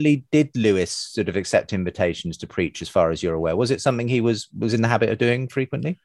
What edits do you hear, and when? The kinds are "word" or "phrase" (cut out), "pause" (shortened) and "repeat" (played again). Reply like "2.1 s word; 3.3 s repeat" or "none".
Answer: none